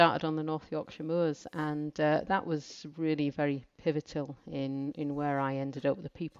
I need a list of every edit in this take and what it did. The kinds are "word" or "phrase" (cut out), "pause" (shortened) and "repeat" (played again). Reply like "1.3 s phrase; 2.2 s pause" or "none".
none